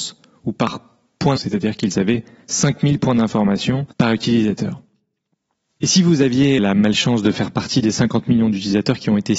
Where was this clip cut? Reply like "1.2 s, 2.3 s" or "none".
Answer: 1.4 s, 3.9 s, 6.6 s